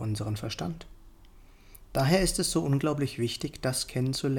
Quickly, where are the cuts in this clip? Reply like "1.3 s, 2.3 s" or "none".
none